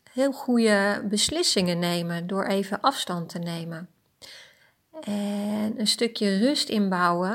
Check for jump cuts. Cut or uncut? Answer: uncut